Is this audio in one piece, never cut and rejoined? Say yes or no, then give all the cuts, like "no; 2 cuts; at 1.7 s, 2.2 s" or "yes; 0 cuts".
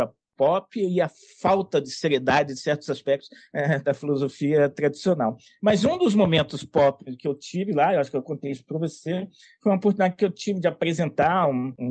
yes; 0 cuts